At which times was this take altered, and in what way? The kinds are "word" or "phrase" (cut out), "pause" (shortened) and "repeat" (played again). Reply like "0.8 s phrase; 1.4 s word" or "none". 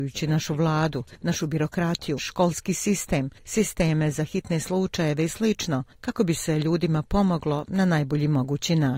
2.2 s word